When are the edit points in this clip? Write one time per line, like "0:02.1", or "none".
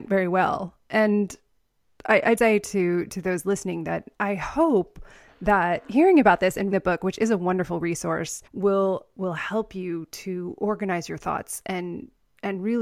0:02.4
0:04.1
0:06.7
0:08.5